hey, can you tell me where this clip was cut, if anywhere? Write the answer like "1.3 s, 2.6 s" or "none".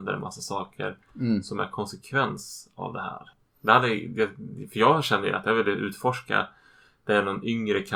none